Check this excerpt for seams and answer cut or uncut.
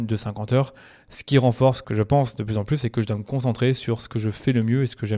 cut